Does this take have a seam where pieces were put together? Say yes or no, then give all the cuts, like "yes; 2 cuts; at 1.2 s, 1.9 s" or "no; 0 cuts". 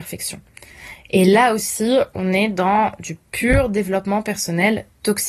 no; 0 cuts